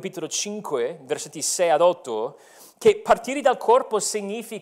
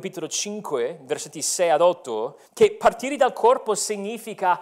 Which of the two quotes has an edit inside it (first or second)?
second